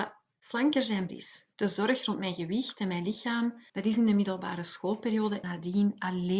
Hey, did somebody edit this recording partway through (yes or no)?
yes